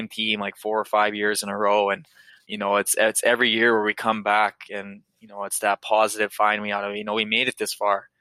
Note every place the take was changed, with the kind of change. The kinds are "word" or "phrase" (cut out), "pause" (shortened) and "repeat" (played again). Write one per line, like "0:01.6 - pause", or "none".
0:02.4 - word